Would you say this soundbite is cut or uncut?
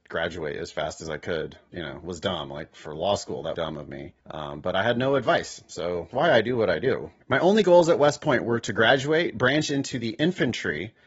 cut